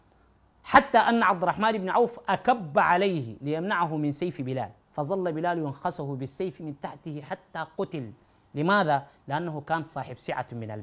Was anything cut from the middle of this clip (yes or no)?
yes